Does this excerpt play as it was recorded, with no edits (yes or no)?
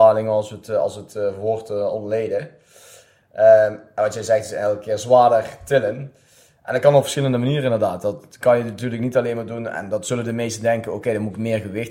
yes